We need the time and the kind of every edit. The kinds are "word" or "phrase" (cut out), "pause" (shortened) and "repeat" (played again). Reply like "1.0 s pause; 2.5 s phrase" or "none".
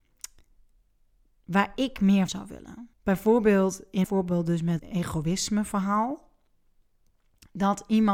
2.3 s word; 2.9 s pause; 4.0 s word; 4.8 s word